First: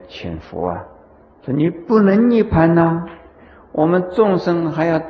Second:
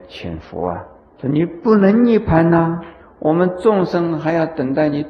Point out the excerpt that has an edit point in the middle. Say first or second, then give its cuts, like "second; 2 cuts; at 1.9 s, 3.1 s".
second; 2 cuts; at 1.0 s, 3.0 s